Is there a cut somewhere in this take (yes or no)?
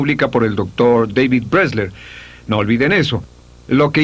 no